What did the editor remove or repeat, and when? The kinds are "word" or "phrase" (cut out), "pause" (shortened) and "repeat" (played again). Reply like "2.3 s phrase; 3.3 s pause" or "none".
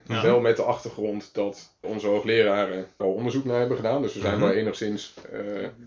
1.8 s word; 3.0 s word